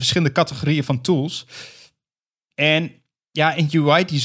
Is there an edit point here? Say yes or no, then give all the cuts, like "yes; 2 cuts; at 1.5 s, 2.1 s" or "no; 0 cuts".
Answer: no; 0 cuts